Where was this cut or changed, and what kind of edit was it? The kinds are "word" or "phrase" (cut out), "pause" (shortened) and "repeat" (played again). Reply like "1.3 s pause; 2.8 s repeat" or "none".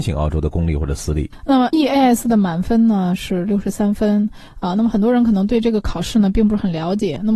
1.7 s word

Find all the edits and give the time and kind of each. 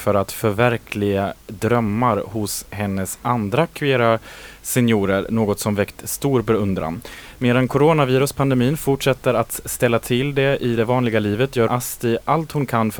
11.7 s word

